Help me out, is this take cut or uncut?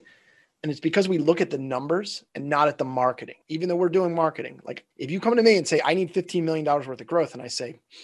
cut